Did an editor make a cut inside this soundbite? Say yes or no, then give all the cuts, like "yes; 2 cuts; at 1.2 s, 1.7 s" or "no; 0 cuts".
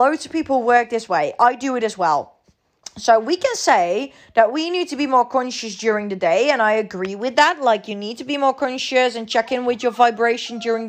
no; 0 cuts